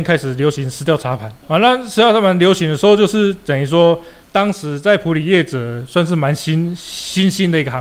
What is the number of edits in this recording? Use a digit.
2